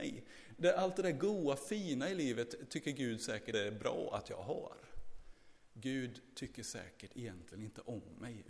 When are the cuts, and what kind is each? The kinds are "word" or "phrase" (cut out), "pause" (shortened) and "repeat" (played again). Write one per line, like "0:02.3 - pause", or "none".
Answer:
0:03.5 - word